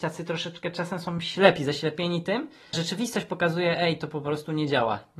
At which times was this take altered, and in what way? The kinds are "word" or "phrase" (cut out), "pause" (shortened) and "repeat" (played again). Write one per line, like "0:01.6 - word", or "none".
0:02.7 - word